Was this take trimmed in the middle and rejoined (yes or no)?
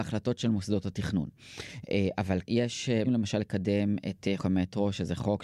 yes